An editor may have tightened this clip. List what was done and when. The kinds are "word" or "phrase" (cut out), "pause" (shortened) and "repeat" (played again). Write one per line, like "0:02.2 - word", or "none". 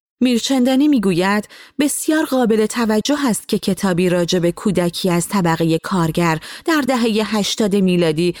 none